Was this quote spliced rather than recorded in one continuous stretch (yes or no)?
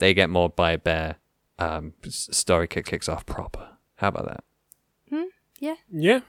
yes